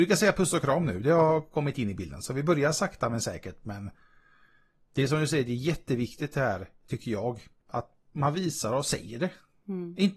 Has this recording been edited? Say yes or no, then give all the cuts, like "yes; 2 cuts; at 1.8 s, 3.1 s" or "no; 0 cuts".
no; 0 cuts